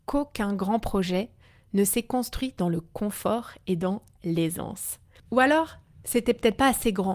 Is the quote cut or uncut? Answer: uncut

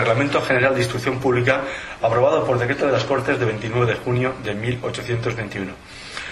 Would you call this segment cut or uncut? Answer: uncut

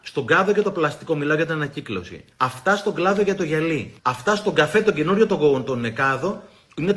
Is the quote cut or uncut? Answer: cut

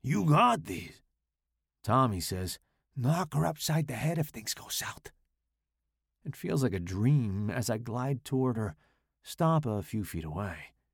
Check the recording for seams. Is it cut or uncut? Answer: uncut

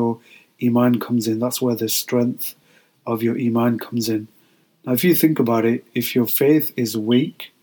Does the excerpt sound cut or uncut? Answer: uncut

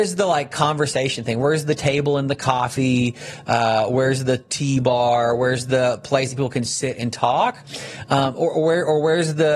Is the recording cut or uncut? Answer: uncut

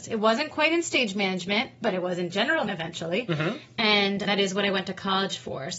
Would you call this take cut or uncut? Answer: cut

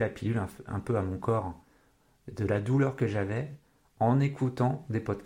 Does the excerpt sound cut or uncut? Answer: uncut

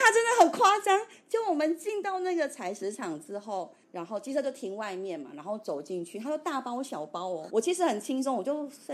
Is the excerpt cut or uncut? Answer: cut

